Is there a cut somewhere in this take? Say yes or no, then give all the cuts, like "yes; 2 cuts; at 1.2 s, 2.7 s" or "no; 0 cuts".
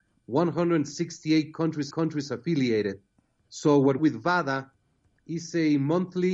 yes; 2 cuts; at 1.9 s, 4.0 s